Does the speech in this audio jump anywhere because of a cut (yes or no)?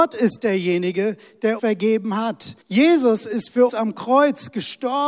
yes